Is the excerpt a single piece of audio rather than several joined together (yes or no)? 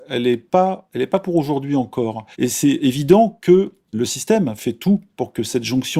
no